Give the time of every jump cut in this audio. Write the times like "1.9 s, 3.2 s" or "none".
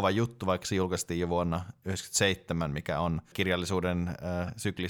3.3 s

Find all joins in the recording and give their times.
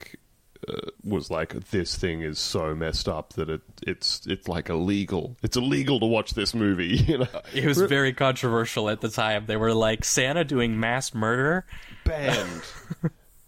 1.0 s

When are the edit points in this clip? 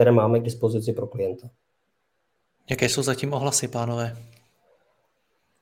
none

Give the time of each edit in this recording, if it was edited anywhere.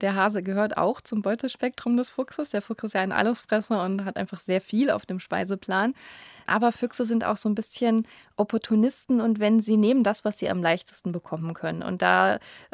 none

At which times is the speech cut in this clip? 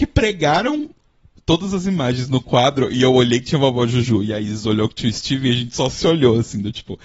none

